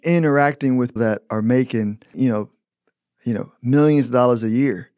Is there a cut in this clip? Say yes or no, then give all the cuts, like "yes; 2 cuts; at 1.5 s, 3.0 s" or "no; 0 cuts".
yes; 2 cuts; at 1.0 s, 2.1 s